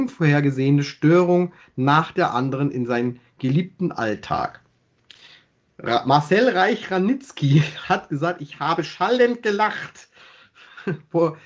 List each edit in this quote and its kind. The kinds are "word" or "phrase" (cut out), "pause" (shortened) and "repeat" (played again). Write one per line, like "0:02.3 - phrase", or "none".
none